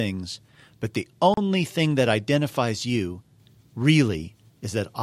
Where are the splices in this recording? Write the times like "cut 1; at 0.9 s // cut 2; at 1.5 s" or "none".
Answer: none